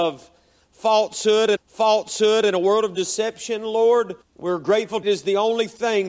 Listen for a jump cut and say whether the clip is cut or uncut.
cut